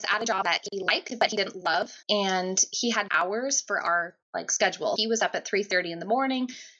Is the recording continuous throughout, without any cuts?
no; 4 cuts; at 2.0 s, 3.1 s, 4.2 s, 5.0 s

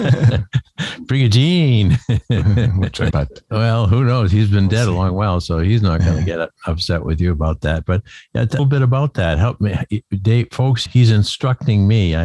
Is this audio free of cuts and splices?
no; 3 cuts; at 3.1 s, 8.6 s, 10.9 s

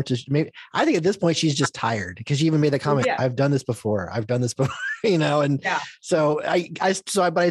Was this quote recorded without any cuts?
yes; 0 cuts

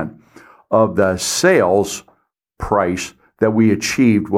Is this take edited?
no; 0 cuts

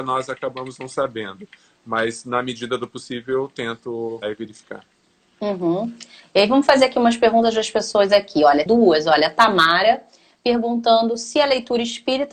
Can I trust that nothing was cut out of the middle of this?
no; 2 cuts; at 4.2 s, 8.7 s

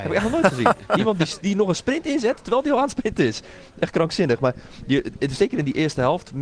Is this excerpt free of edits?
yes; 0 cuts

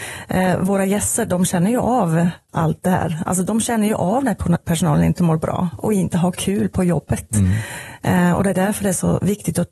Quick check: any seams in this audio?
no; 0 cuts

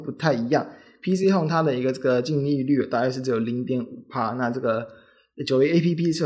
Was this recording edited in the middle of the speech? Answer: no; 0 cuts

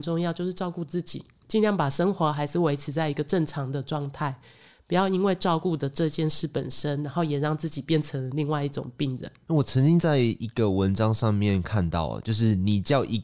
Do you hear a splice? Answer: no; 0 cuts

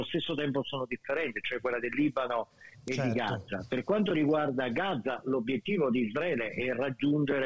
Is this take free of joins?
yes; 0 cuts

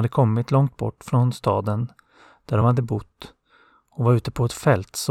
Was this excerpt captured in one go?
yes; 0 cuts

